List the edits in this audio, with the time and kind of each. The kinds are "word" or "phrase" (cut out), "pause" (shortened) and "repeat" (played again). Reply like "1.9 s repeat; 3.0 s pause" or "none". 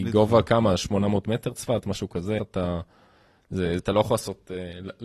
2.4 s word; 3.8 s word

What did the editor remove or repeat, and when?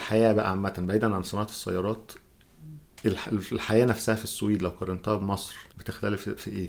5.7 s pause

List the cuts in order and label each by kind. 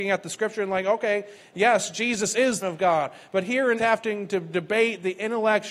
2.6 s phrase; 3.8 s phrase

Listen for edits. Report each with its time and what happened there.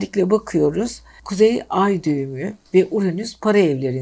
1.2 s word

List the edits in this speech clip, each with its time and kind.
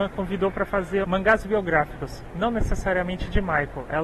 1.0 s phrase

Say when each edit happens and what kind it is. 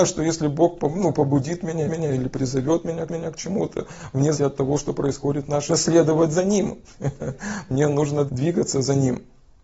1.8 s repeat; 3.1 s repeat; 4.3 s word; 5.7 s phrase; 8.3 s word

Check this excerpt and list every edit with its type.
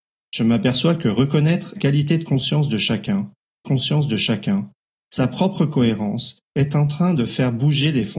1.8 s word; 3.6 s repeat; 6.4 s pause

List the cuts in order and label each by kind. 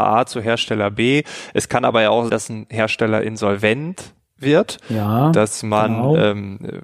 2.3 s word

